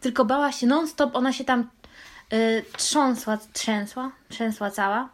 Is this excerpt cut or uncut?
uncut